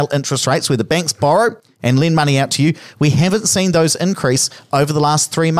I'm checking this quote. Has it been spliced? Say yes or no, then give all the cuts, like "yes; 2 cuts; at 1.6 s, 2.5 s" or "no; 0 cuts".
no; 0 cuts